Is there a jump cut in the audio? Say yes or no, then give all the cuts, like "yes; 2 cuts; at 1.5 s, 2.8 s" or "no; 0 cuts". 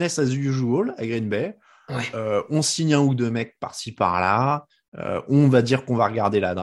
no; 0 cuts